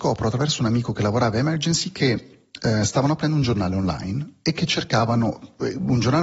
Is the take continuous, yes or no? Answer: yes